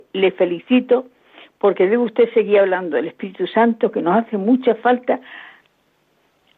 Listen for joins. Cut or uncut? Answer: uncut